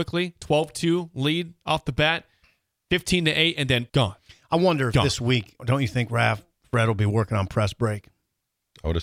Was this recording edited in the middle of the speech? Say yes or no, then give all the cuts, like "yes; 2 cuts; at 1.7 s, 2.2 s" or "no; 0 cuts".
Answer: yes; 2 cuts; at 3.9 s, 5.6 s